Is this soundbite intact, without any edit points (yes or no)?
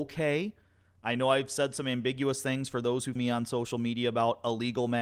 no